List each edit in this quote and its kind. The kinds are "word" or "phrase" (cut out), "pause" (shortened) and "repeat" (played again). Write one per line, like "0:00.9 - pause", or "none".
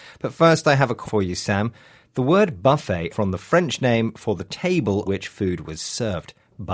0:01.0 - word
0:03.1 - word
0:05.0 - word